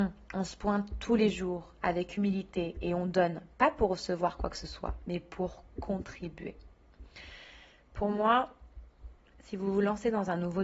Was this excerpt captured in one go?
yes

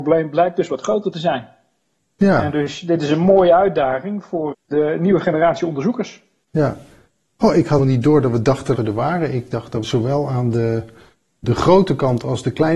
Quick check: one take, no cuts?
no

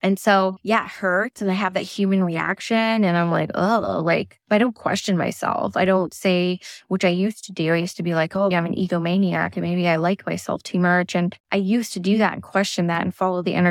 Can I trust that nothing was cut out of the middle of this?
no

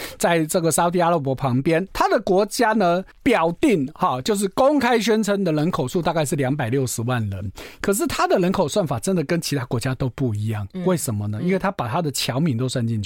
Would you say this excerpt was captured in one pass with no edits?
no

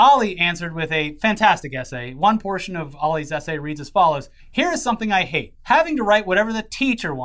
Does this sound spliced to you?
yes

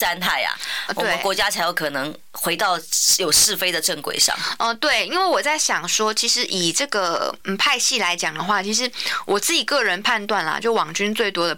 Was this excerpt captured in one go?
yes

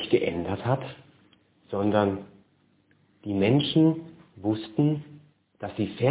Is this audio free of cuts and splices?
yes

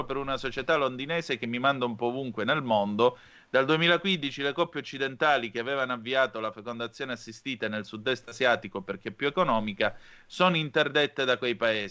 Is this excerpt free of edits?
yes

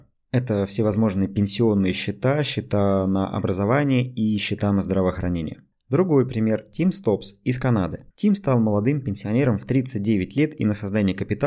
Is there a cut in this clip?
yes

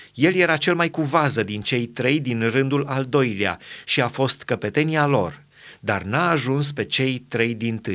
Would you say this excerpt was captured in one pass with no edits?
yes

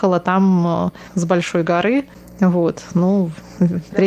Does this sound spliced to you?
yes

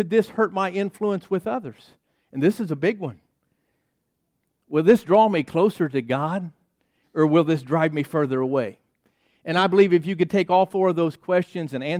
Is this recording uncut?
yes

